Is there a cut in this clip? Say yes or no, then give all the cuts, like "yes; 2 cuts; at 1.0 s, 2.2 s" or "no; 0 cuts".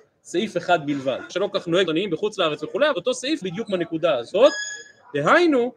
yes; 4 cuts; at 1.3 s, 1.9 s, 2.9 s, 3.4 s